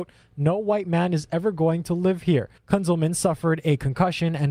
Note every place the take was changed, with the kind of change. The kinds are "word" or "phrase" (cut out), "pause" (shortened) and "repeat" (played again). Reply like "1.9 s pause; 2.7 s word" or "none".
2.6 s pause